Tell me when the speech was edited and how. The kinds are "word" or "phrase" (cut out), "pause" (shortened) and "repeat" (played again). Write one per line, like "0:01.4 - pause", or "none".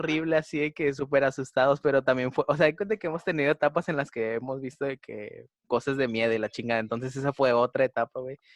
0:05.5 - pause